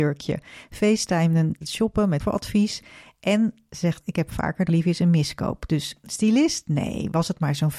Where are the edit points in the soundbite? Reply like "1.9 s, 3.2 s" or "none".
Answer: 1.6 s, 2.2 s, 4.0 s, 4.7 s